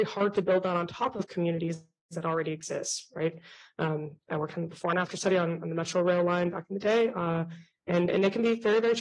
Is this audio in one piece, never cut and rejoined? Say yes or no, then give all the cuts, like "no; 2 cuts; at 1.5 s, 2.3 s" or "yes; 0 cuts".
yes; 0 cuts